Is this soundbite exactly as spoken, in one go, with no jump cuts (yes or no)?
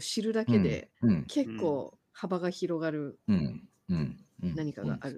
no